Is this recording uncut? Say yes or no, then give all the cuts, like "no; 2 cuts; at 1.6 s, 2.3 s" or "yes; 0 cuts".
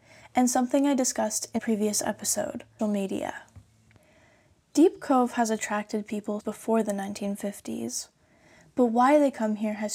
no; 3 cuts; at 1.6 s, 2.8 s, 6.4 s